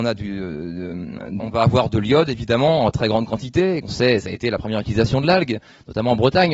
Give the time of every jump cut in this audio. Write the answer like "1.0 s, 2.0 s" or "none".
1.4 s, 3.8 s

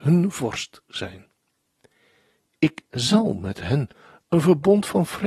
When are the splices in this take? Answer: none

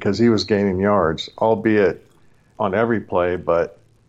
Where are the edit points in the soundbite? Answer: 2.5 s

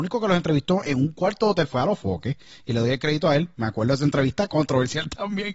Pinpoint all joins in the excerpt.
none

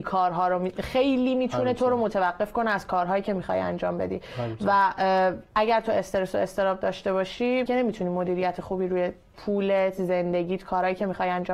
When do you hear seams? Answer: 7.7 s, 9.3 s

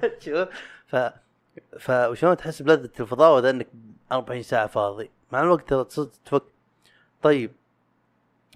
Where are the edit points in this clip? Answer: none

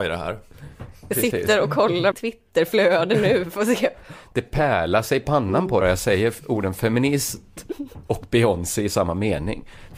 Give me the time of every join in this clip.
2.1 s, 5.8 s

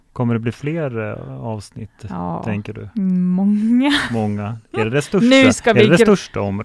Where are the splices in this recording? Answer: 4.6 s

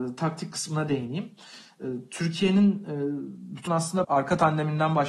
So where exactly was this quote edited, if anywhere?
3.7 s, 4.0 s

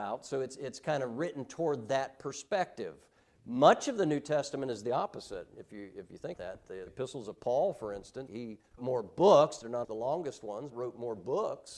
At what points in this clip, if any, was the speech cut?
6.3 s, 6.9 s, 8.3 s, 8.8 s, 9.8 s, 10.7 s

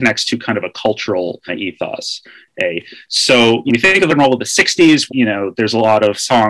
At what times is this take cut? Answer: 1.5 s, 3.7 s, 4.1 s, 5.1 s

